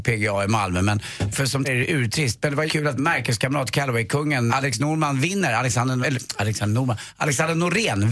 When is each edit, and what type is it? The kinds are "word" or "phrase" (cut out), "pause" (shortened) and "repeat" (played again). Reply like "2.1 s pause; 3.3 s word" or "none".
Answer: 1.3 s word; 1.6 s word; 2.7 s word; 3.0 s word; 4.5 s word; 6.0 s word